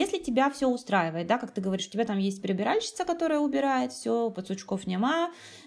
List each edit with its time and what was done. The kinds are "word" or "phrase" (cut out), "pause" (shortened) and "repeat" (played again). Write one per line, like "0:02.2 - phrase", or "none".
none